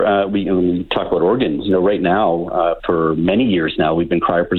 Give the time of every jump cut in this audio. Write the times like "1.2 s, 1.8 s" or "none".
2.8 s